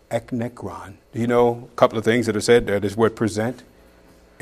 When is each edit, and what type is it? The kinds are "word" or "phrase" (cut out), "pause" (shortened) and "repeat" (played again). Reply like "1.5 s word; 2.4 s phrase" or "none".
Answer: 1.1 s pause